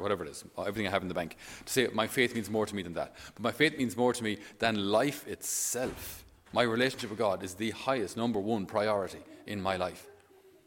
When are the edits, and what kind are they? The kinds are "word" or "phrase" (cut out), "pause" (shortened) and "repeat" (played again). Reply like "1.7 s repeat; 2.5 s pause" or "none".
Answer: none